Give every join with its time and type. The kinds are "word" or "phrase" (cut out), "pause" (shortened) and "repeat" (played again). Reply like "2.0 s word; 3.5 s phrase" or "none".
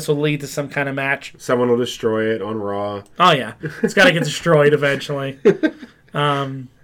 none